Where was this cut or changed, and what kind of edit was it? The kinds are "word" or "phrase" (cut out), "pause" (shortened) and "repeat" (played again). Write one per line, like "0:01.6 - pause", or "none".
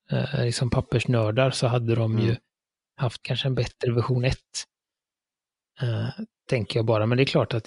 0:03.2 - word